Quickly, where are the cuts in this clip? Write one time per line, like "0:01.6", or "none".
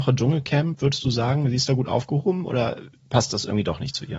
none